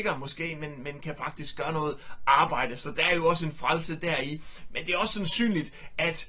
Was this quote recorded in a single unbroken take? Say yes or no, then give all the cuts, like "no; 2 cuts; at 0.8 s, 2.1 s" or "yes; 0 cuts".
yes; 0 cuts